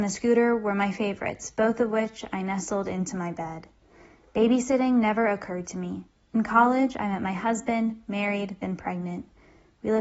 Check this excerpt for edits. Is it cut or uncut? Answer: uncut